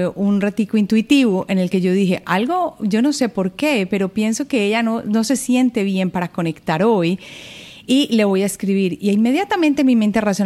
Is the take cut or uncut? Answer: uncut